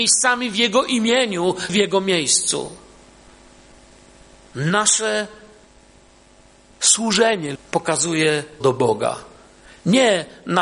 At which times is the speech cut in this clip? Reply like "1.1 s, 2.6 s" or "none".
1.7 s, 7.6 s, 8.6 s